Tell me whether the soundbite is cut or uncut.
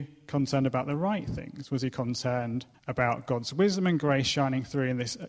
cut